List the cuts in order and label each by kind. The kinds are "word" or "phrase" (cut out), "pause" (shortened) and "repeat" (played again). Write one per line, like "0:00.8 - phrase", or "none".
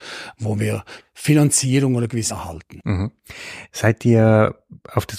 0:01.0 - word
0:02.3 - word

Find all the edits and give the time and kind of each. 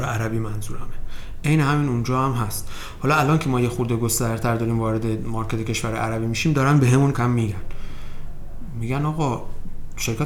0:07.1 - word

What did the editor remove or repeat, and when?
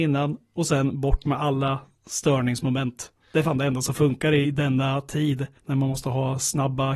0:03.2 - pause
0:04.4 - word
0:05.6 - pause

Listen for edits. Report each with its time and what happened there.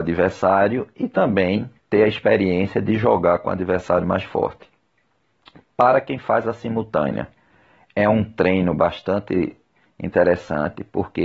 0:01.8 - pause

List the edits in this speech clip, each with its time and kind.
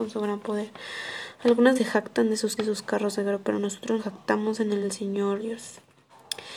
0:01.7 - word
0:02.6 - word
0:04.0 - word
0:04.8 - word
0:05.4 - word

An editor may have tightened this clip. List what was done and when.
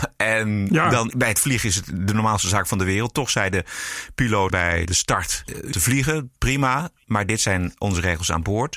0:01.1 - phrase
0:04.5 - word
0:04.8 - word
0:05.7 - phrase

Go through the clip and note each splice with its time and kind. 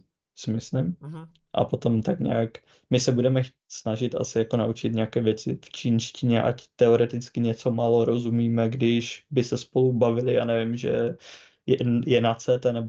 none

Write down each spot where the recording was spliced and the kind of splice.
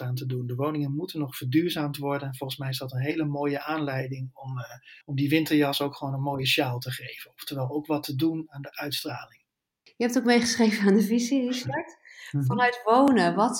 0:05.0 - pause

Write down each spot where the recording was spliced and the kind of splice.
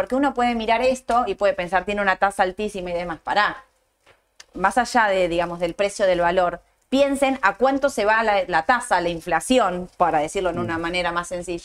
none

